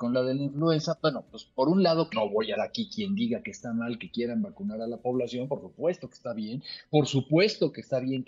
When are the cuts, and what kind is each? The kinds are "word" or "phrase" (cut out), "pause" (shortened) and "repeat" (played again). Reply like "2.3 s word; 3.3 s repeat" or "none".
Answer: 2.1 s word; 2.6 s word